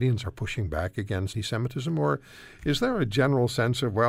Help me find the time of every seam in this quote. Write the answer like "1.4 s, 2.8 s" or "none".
1.3 s